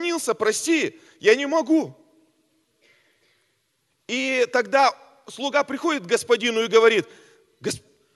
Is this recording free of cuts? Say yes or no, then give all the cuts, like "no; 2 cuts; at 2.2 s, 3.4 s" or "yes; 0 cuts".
yes; 0 cuts